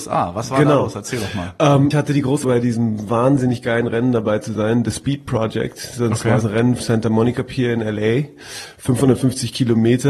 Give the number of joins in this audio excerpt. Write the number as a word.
four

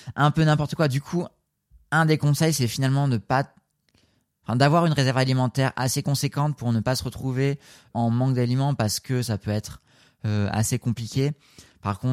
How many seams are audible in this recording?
one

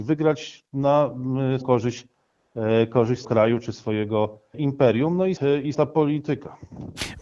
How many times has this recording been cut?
five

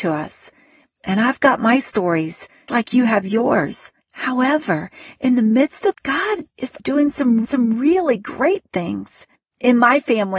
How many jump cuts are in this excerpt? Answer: six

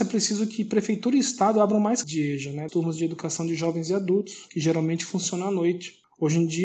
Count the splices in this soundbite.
two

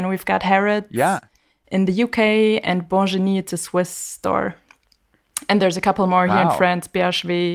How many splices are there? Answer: zero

